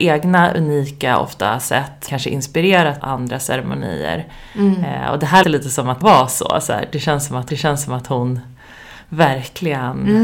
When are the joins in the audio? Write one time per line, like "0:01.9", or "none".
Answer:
0:02.1
0:03.0
0:05.4
0:06.0
0:07.5